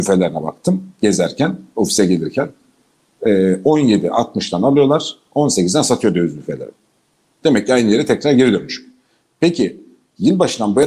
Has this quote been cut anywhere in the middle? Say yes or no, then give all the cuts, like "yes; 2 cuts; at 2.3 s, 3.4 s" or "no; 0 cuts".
no; 0 cuts